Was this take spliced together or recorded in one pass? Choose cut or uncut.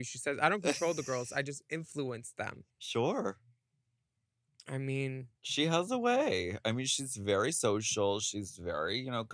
cut